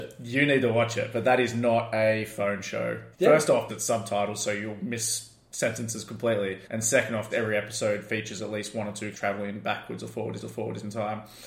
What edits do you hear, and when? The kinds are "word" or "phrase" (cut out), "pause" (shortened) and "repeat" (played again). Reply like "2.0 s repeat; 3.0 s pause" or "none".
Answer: 3.1 s pause; 3.7 s word; 6.6 s pause; 7.3 s word; 9.1 s word; 10.4 s repeat